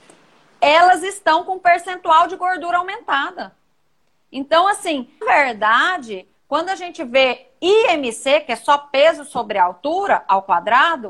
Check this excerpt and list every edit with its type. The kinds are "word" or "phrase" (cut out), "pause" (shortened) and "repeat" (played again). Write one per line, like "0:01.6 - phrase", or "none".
0:05.2 - word